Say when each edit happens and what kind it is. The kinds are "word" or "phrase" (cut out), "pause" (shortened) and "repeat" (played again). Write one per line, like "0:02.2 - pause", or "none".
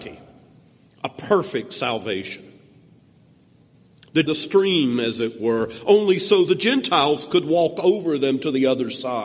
0:04.3 - phrase